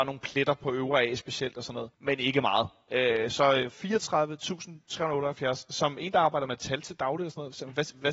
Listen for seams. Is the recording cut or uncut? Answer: cut